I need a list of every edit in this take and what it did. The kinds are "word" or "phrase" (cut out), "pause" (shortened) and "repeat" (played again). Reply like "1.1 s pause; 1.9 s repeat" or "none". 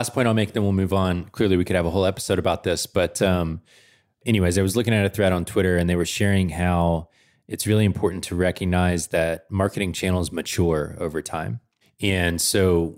none